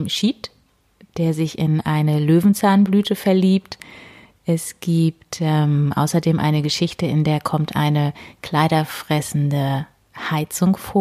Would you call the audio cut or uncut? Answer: uncut